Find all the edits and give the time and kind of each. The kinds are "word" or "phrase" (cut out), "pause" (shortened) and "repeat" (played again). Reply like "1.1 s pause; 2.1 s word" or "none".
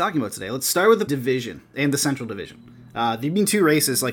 1.1 s word; 1.7 s word

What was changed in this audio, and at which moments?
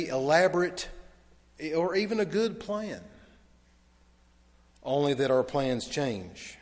none

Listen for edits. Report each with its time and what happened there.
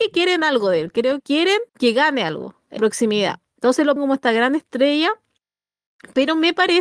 1.2 s word; 1.7 s pause; 2.8 s word; 4.0 s word

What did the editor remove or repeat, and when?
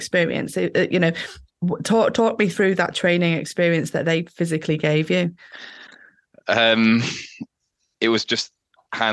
none

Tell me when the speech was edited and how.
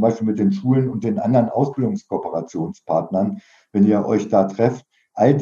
none

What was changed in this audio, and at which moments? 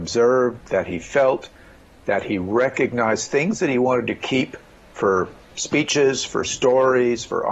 none

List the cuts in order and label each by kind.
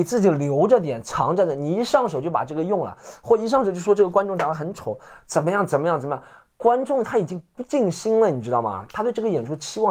none

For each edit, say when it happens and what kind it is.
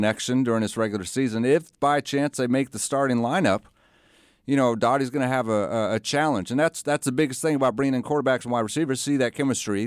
none

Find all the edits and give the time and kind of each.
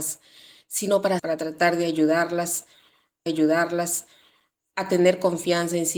1.2 s word; 3.3 s repeat

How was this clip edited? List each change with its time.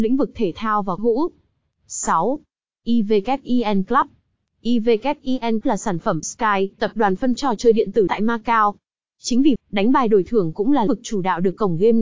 1.0 s word; 5.6 s word; 6.2 s word; 6.8 s word; 7.4 s word; 8.1 s word; 9.6 s word; 10.9 s word

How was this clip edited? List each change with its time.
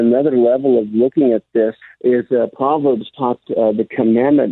1.8 s pause; 3.4 s word

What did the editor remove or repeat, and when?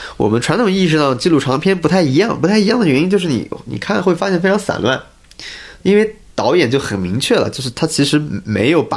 6.3 s word

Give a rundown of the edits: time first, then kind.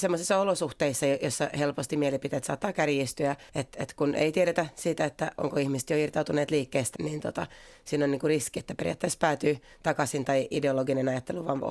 3.5 s pause; 7.0 s word

